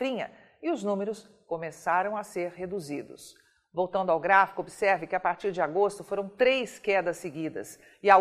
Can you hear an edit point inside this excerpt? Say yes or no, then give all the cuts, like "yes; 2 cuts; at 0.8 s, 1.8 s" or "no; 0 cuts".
no; 0 cuts